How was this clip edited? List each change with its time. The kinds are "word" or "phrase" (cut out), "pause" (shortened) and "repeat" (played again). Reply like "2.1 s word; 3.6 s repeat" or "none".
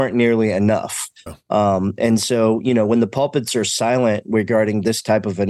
none